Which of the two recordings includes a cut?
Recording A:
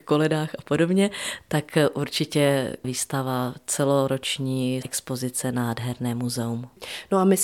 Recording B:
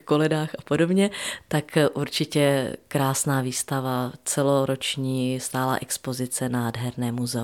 A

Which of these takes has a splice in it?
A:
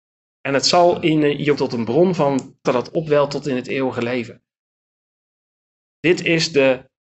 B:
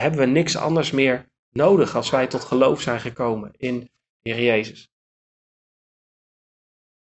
A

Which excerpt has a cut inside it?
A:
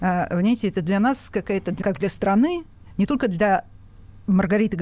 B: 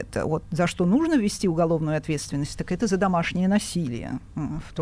A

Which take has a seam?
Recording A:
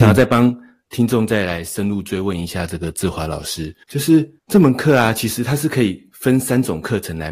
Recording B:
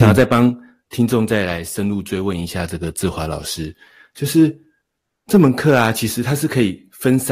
A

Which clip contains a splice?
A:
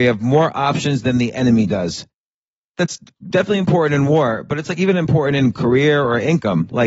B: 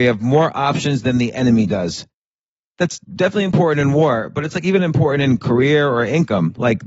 B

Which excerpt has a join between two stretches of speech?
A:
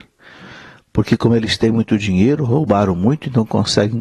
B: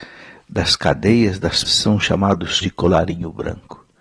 B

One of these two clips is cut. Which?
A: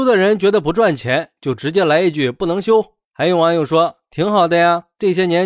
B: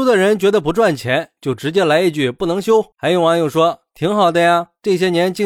B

